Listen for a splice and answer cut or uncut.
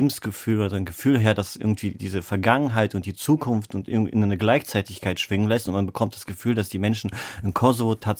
uncut